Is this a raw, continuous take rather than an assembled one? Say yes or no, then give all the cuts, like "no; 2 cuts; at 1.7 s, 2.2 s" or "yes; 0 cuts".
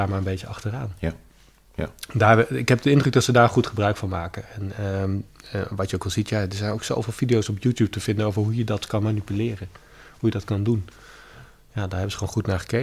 yes; 0 cuts